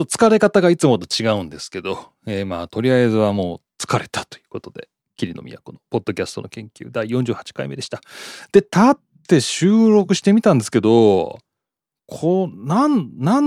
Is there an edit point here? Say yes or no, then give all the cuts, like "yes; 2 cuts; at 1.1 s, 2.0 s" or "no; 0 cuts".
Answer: no; 0 cuts